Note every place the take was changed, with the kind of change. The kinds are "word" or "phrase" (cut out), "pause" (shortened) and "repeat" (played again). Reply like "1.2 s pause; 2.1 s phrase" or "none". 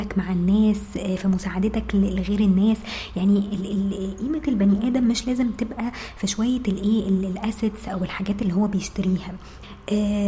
none